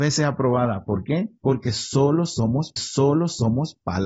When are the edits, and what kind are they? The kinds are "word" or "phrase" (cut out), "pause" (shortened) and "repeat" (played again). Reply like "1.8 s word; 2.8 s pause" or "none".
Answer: 2.8 s repeat